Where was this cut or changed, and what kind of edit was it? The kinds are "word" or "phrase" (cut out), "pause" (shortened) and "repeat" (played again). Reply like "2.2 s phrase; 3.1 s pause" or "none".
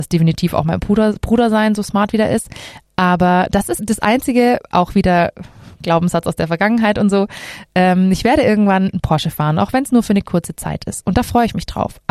3.8 s word